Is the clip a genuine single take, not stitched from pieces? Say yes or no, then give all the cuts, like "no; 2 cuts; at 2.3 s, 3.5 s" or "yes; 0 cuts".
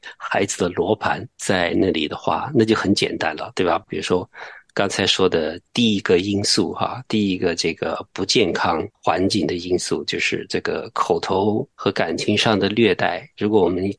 yes; 0 cuts